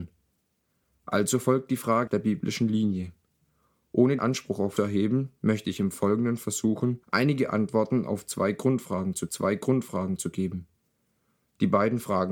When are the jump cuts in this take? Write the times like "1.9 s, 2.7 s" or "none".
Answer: 2.1 s, 4.2 s, 4.8 s, 7.0 s, 9.3 s